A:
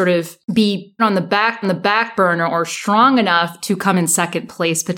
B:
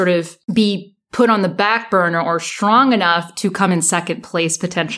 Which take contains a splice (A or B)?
A